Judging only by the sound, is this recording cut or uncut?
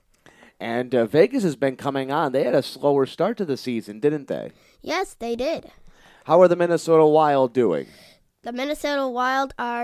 uncut